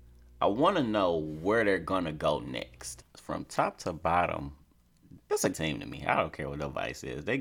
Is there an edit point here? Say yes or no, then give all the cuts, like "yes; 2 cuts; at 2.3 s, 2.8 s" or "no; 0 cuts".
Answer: yes; 1 cut; at 5.5 s